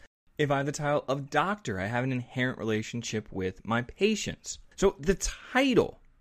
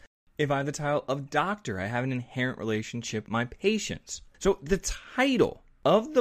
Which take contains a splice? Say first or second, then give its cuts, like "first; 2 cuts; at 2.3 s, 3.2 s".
second; 1 cut; at 3.3 s